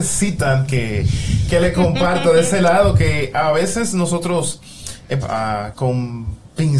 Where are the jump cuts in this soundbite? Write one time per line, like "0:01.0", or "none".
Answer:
0:05.2
0:05.7